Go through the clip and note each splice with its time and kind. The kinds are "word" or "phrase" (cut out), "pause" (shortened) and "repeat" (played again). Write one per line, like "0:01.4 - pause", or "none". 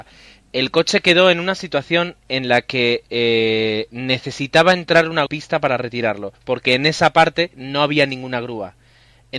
0:05.3 - phrase
0:06.3 - pause
0:07.5 - pause